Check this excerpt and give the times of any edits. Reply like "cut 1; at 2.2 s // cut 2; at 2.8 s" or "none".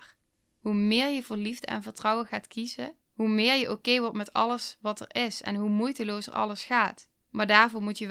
cut 1; at 3.0 s // cut 2; at 7.2 s